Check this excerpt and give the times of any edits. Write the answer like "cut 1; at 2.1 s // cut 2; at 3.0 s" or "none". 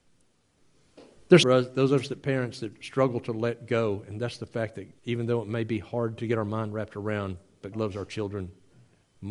cut 1; at 1.4 s // cut 2; at 5.0 s // cut 3; at 7.7 s